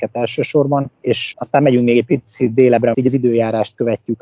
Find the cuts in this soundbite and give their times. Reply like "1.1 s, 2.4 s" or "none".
0.9 s, 2.9 s